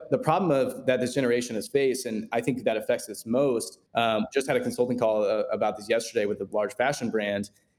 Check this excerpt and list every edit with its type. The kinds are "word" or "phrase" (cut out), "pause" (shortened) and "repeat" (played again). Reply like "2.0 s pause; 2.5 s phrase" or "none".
3.9 s pause